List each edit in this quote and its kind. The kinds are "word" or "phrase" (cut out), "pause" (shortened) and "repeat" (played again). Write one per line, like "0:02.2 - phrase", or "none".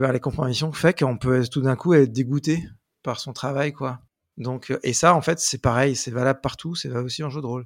none